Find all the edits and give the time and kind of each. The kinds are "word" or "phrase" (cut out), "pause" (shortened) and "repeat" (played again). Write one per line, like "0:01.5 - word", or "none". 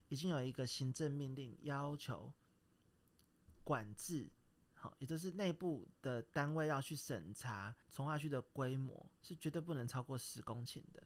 0:04.5 - pause
0:07.8 - pause
0:09.2 - pause